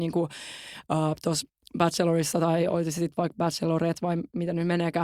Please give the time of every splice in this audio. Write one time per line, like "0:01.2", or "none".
none